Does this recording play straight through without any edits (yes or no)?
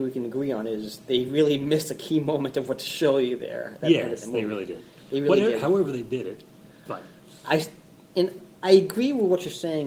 yes